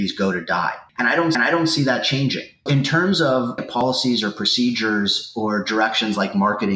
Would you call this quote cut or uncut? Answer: cut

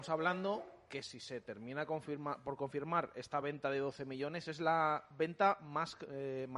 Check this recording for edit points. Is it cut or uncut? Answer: uncut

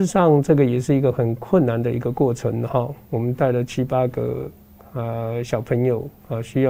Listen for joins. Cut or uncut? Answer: uncut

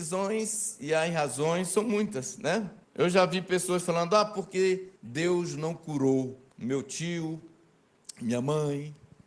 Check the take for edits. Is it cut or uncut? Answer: cut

